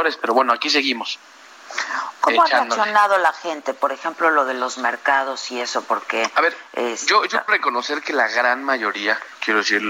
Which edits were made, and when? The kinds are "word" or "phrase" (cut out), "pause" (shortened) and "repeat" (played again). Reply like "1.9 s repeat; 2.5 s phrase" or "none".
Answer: 7.5 s word

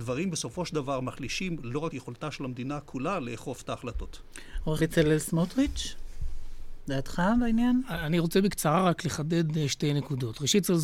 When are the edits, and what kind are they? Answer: 1.9 s phrase; 4.8 s word

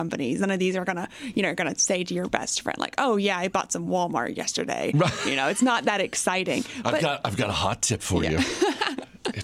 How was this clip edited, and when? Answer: none

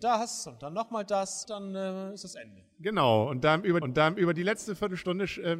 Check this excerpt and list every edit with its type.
1.4 s word; 3.8 s repeat

